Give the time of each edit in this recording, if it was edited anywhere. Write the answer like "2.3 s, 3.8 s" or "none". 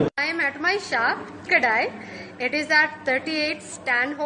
1.5 s